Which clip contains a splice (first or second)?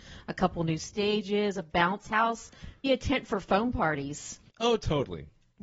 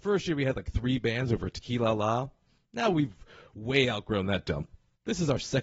first